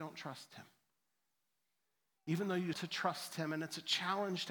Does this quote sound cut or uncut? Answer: cut